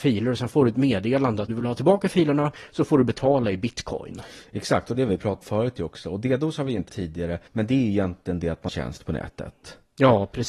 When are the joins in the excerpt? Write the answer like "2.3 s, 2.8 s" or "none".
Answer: 1.5 s, 5.4 s, 6.9 s, 7.5 s, 8.7 s